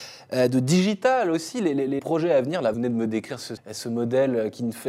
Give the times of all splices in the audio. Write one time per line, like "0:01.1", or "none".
0:02.0
0:02.7
0:03.6